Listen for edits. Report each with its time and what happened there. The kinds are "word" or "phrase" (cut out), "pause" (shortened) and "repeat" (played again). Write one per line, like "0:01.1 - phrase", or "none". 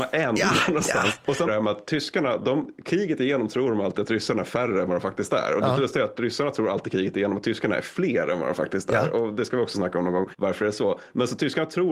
0:01.5 - phrase